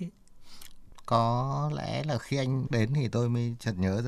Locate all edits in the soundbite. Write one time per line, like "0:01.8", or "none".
0:02.7